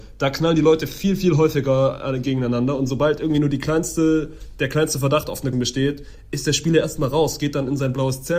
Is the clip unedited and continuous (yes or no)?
no